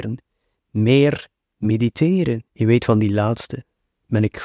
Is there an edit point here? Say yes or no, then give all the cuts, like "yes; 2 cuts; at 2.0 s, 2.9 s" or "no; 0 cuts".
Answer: yes; 1 cut; at 2.5 s